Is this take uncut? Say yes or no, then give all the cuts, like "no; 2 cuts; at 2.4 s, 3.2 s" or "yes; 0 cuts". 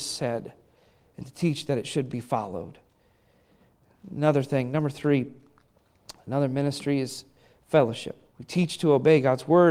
no; 1 cut; at 8.3 s